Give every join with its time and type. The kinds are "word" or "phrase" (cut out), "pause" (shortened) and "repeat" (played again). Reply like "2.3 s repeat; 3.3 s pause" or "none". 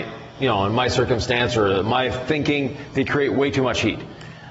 none